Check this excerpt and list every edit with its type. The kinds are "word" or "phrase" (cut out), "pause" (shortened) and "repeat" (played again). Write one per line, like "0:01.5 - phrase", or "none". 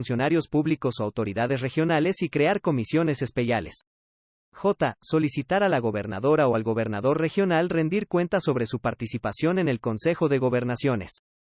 none